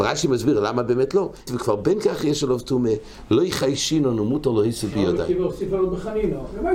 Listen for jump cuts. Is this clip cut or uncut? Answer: cut